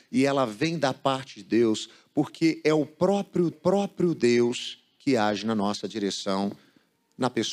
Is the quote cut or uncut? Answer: cut